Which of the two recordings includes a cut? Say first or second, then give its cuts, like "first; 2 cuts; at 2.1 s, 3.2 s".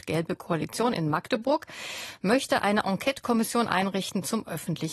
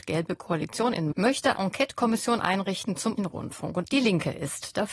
second; 4 cuts; at 1.1 s, 1.6 s, 3.2 s, 3.8 s